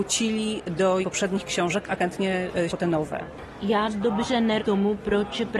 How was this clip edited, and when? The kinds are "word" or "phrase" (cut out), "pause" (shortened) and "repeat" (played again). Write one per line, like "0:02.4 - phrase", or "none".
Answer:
0:01.0 - word
0:02.0 - word
0:02.7 - word
0:03.9 - word
0:04.6 - word